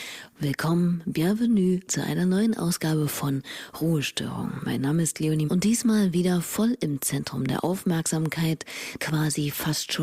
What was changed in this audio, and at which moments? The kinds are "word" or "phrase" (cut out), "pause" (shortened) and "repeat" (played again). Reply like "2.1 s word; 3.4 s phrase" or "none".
1.9 s word; 5.5 s word; 9.0 s word